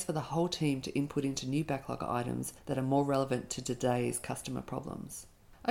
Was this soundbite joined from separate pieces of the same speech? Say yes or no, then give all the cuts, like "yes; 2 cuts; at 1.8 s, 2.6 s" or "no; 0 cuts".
yes; 1 cut; at 2.6 s